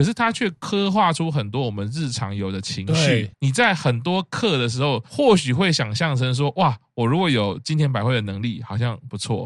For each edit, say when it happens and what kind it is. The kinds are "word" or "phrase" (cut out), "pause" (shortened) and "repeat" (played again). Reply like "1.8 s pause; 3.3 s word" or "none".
3.3 s pause